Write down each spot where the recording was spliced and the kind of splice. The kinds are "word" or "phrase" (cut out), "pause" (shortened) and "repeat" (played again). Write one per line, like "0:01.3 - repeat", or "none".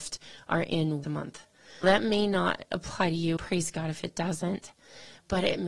0:01.0 - word
0:01.8 - word
0:03.4 - word